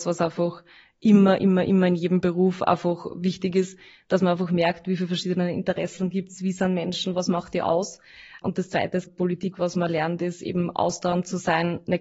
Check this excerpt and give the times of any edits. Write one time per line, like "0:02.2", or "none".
0:09.1